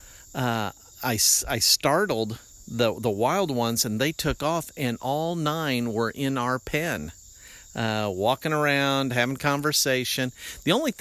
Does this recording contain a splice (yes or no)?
no